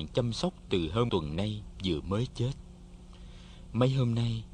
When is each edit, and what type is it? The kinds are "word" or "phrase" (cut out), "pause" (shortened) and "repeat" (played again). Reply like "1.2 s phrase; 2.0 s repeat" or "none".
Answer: 1.1 s word